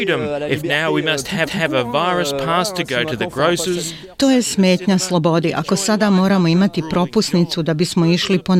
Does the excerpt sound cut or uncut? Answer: cut